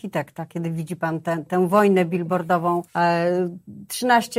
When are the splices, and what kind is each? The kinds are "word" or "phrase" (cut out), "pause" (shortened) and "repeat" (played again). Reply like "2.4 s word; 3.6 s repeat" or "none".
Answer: 2.9 s pause